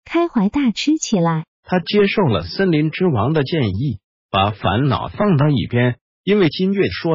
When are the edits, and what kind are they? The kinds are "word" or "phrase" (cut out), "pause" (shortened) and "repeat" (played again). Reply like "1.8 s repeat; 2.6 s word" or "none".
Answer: 1.5 s pause